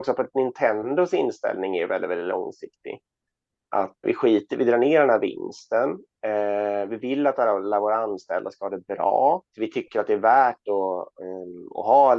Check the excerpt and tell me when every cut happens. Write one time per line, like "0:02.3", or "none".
0:04.0
0:09.5